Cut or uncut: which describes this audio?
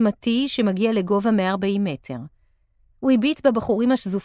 uncut